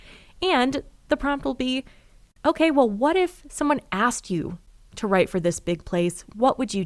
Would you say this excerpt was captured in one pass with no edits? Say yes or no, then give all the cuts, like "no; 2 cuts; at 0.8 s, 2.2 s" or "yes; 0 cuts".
yes; 0 cuts